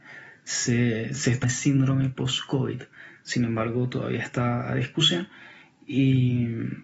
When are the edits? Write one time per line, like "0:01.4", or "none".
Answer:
0:01.4